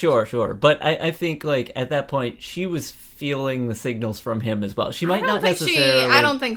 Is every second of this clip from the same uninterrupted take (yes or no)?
no